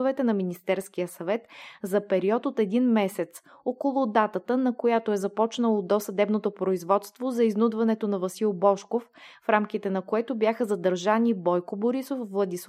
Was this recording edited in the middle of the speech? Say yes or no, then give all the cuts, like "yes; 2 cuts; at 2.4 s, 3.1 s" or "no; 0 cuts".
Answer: no; 0 cuts